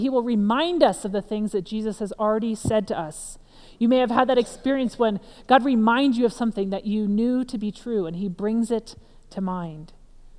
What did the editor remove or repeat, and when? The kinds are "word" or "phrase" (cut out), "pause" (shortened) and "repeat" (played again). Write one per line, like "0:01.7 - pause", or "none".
none